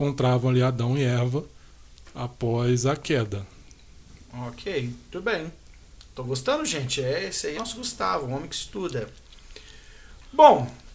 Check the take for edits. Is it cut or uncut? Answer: cut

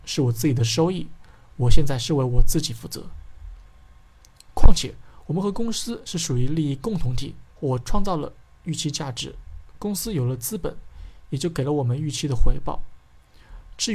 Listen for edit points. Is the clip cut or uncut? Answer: cut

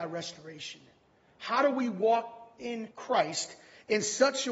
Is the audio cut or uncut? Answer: cut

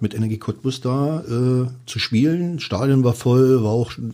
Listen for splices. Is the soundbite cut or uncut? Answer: uncut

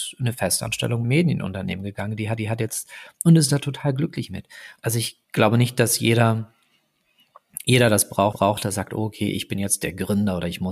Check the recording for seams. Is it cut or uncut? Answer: cut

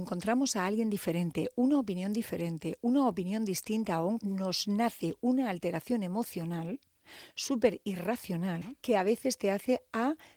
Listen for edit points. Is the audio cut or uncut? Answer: cut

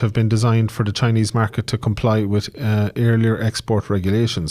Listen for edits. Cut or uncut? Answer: uncut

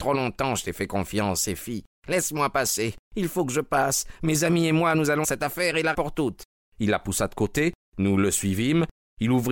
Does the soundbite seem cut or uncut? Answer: cut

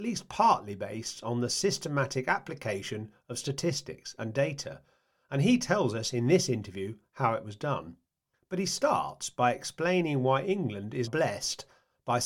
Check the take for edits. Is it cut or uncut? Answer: cut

